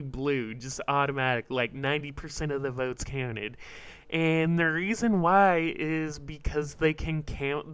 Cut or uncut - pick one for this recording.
uncut